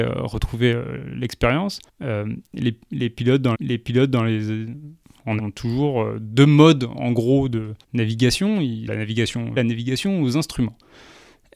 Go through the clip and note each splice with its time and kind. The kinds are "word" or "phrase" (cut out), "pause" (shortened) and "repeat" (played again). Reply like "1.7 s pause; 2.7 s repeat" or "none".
1.9 s pause; 3.5 s repeat; 5.4 s word; 7.8 s pause; 8.9 s phrase; 9.6 s phrase